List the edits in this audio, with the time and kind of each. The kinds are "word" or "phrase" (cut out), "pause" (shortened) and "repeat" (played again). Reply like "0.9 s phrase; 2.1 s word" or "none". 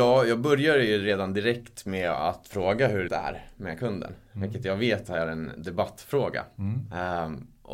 3.1 s word